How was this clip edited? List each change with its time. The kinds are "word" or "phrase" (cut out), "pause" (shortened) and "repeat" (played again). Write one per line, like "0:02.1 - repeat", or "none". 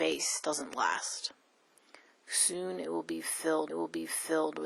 0:03.7 - repeat